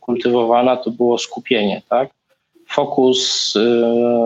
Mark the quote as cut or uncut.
uncut